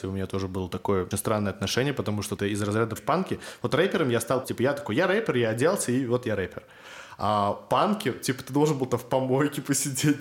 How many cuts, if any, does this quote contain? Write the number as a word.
four